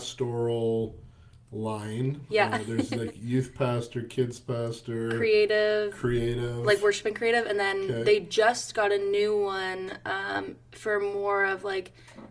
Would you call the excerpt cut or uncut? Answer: uncut